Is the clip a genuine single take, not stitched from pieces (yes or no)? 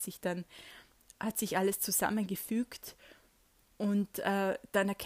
yes